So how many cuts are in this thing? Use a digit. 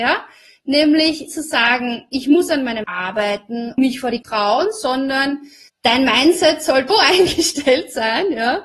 6